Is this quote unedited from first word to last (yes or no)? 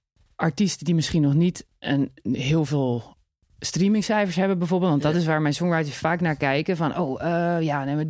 yes